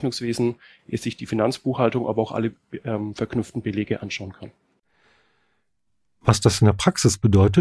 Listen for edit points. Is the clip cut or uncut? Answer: uncut